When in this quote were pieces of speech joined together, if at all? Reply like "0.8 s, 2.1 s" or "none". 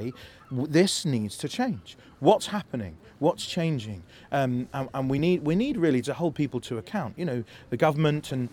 none